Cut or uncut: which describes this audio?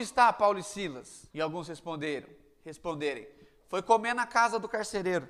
cut